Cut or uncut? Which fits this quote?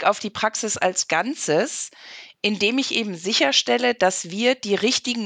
uncut